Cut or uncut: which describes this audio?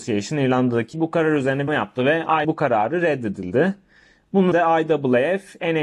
cut